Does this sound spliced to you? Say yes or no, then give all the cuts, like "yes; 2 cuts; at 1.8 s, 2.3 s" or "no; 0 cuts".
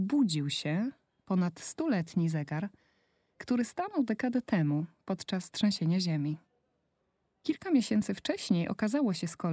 no; 0 cuts